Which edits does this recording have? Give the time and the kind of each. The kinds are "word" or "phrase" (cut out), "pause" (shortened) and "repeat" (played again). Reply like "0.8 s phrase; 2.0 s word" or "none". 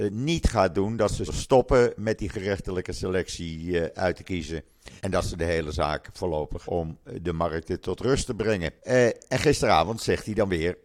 1.3 s word; 5.0 s pause; 6.6 s word; 8.8 s pause